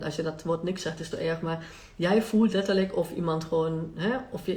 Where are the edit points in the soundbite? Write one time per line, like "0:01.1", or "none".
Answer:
0:01.1